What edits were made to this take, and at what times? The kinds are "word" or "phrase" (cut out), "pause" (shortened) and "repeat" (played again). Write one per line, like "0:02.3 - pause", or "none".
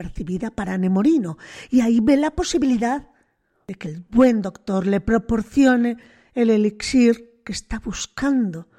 none